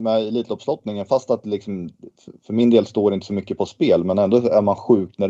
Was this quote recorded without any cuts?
yes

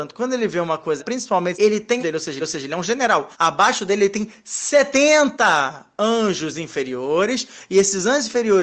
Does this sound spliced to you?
yes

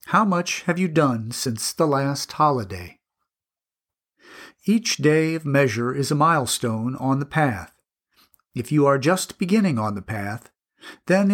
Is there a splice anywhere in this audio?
no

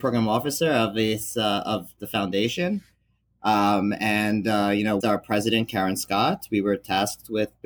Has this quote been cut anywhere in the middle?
yes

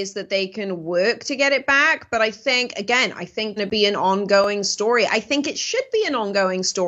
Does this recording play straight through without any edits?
no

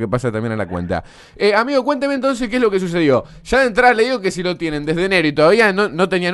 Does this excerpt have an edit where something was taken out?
no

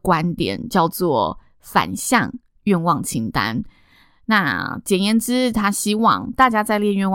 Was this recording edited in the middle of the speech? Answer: no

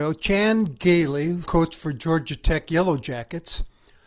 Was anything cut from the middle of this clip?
yes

